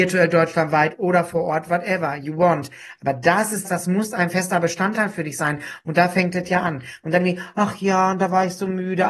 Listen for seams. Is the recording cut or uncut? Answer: cut